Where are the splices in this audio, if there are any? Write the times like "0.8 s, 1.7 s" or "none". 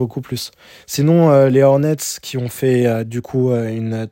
none

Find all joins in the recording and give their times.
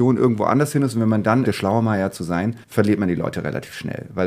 1.5 s, 2.6 s

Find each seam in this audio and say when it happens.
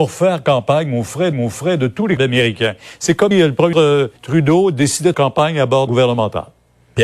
1.3 s, 2.2 s, 3.3 s, 3.7 s, 4.2 s, 5.1 s, 5.9 s

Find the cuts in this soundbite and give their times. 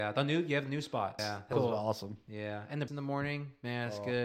1.2 s, 1.5 s, 2.9 s

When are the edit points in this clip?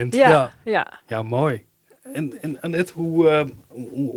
none

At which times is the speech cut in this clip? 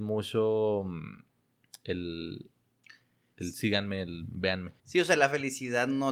4.8 s

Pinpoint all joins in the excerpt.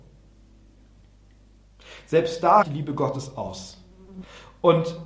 2.6 s

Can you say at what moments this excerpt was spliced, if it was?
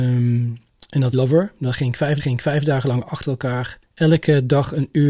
1.1 s, 2.2 s, 3.9 s

